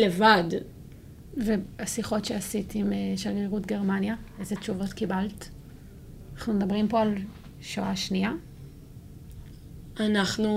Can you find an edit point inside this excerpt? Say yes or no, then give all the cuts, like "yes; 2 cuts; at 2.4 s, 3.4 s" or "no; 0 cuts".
no; 0 cuts